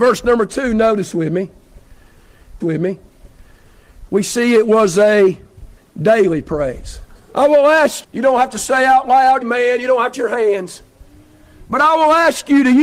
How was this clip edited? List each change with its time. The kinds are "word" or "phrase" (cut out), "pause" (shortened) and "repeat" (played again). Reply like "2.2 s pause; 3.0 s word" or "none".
2.6 s repeat; 5.8 s pause; 7.1 s pause; 8.0 s word; 9.4 s phrase; 10.1 s phrase

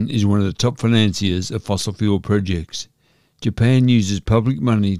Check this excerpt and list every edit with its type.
none

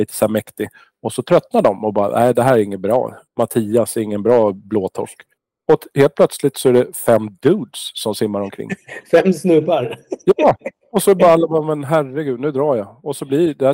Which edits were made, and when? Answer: 3.3 s pause; 5.4 s pause

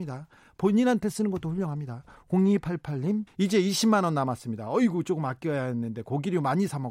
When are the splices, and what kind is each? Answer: 3.3 s pause

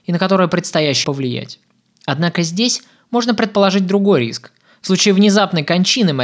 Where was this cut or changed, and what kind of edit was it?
1.0 s phrase

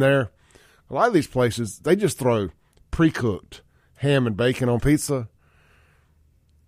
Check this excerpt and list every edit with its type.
none

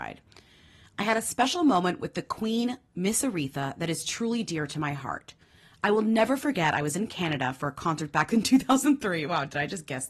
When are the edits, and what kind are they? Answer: none

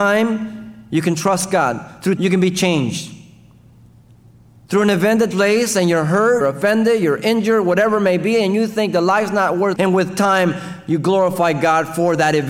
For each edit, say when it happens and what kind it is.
2.2 s word; 5.3 s word; 6.4 s word; 9.8 s word

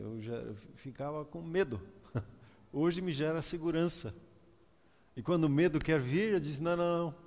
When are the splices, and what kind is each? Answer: none

